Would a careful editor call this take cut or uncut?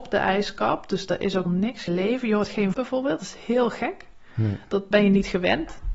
cut